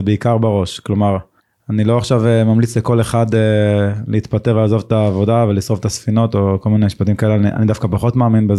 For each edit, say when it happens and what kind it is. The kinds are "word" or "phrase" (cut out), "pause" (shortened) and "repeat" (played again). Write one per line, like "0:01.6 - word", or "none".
0:01.4 - pause